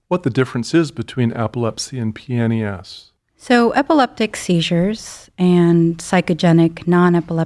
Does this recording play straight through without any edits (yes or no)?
no